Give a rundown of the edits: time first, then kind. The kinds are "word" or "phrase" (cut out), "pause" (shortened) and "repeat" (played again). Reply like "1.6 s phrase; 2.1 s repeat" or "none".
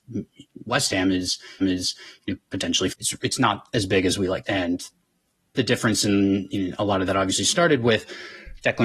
1.6 s repeat; 2.9 s phrase; 4.4 s phrase

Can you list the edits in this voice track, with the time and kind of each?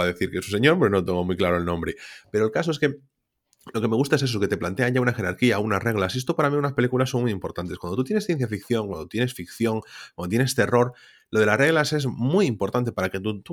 none

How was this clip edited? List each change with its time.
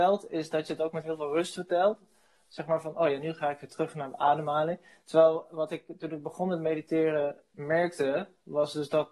none

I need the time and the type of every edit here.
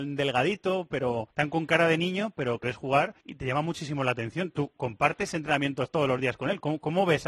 1.3 s pause; 2.6 s phrase; 3.2 s pause

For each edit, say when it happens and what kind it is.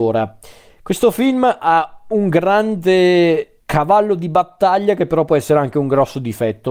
3.6 s pause

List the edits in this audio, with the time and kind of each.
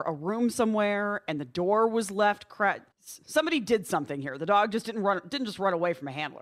2.9 s pause

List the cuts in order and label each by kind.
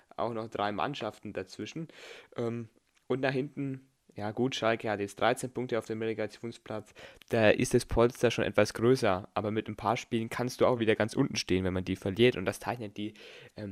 none

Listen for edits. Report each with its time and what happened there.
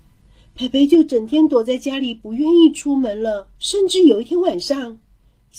3.6 s pause

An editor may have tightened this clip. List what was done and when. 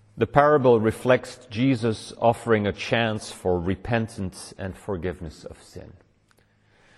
none

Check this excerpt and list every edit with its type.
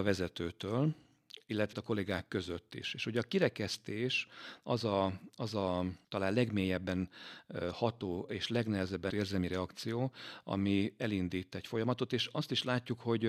1.7 s word; 6.0 s pause; 9.1 s word

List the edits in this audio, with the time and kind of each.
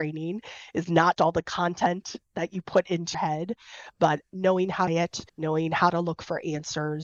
1.2 s word; 3.1 s word; 4.9 s phrase; 5.3 s pause

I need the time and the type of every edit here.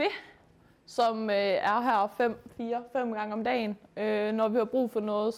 none

